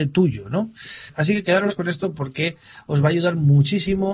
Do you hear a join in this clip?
no; 0 cuts

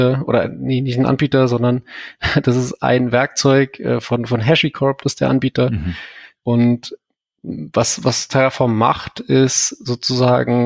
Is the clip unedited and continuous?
yes; 0 cuts

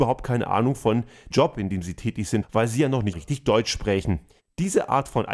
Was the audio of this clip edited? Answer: yes; 3 cuts; at 1.3 s, 2.4 s, 3.1 s

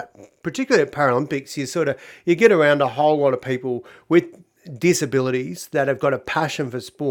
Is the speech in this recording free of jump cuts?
yes; 0 cuts

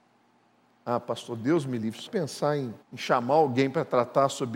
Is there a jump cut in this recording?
yes; 2 cuts; at 2.1 s, 2.8 s

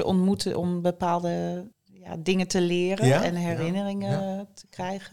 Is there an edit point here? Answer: yes; 1 cut; at 1.7 s

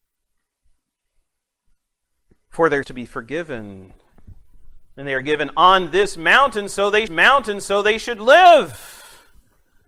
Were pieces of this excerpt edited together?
yes; 2 cuts; at 2.8 s, 7.1 s

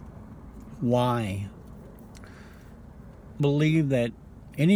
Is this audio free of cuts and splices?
no; 1 cut; at 3.4 s

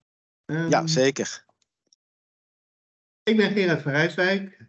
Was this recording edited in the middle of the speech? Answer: no; 0 cuts

